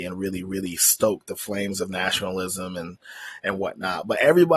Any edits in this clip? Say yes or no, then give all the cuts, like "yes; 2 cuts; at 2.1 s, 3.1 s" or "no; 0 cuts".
no; 0 cuts